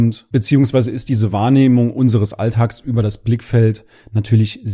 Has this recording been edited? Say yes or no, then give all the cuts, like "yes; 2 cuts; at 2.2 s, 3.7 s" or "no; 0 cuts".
no; 0 cuts